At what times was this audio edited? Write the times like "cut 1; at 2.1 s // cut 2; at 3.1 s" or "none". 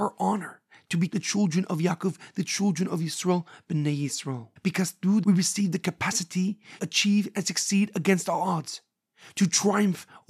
cut 1; at 1.1 s // cut 2; at 4.6 s // cut 3; at 5.2 s // cut 4; at 6.8 s